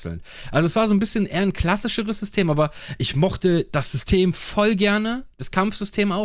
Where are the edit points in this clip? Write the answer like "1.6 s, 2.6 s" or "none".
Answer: none